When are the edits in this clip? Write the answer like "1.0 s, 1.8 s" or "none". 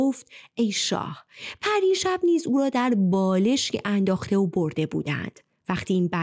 none